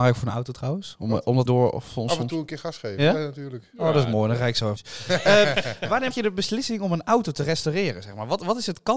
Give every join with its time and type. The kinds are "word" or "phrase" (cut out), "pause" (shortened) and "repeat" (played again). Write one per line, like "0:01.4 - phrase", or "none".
0:01.5 - word
0:04.8 - phrase
0:06.1 - word